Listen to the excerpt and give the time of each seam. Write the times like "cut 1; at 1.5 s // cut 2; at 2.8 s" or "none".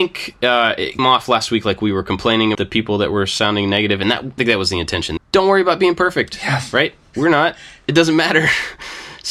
cut 1; at 1.0 s // cut 2; at 2.5 s // cut 3; at 4.4 s // cut 4; at 5.2 s